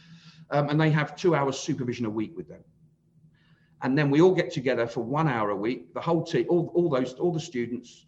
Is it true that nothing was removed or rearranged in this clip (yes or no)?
yes